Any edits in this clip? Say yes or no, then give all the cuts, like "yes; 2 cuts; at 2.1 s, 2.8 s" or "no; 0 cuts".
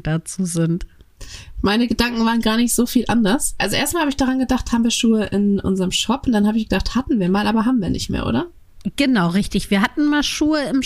no; 0 cuts